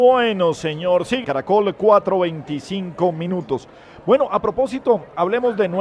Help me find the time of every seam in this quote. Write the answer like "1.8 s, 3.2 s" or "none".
1.2 s